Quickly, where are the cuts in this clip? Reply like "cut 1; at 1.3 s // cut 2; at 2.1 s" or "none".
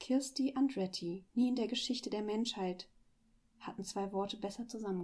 cut 1; at 1.3 s